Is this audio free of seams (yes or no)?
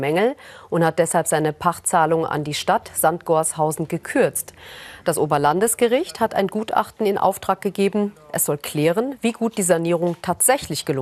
yes